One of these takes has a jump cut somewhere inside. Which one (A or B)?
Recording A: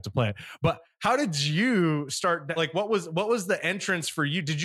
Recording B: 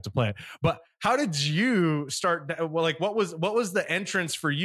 A